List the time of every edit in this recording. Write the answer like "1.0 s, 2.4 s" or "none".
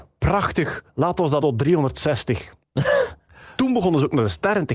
1.4 s, 3.6 s